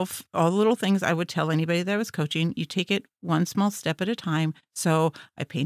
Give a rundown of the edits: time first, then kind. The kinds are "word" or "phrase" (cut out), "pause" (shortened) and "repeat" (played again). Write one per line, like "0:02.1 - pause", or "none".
none